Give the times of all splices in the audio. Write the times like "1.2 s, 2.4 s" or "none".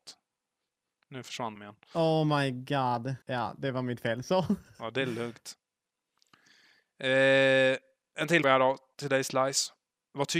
1.6 s, 3.2 s, 8.4 s